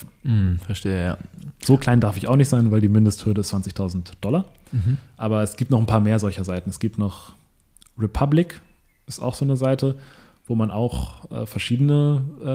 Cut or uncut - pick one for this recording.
uncut